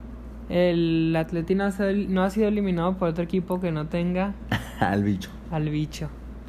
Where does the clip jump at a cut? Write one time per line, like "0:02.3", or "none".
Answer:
none